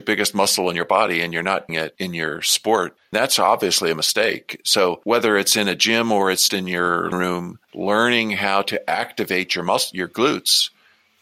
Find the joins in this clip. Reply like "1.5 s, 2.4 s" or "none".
1.7 s, 3.1 s, 6.5 s, 7.1 s